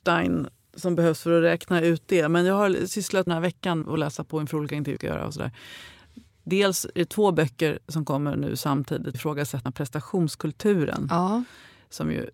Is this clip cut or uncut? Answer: cut